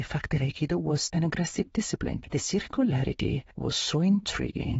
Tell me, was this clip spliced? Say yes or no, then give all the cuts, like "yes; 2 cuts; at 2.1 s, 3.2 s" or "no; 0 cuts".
yes; 2 cuts; at 1.1 s, 3.5 s